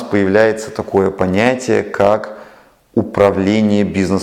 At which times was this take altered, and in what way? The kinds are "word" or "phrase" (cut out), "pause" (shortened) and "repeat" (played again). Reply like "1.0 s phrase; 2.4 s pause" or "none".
none